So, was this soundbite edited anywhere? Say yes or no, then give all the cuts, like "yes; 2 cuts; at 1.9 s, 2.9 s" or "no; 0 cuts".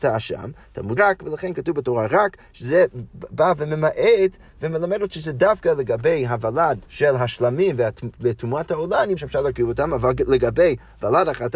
yes; 3 cuts; at 1.0 s, 6.8 s, 9.2 s